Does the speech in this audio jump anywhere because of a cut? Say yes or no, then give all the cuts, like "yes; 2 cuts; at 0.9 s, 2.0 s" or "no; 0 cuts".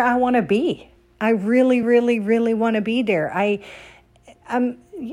no; 0 cuts